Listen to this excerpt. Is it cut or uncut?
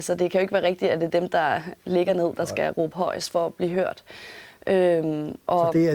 uncut